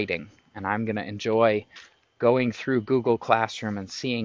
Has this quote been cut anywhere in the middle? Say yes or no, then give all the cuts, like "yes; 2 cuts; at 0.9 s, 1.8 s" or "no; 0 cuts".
no; 0 cuts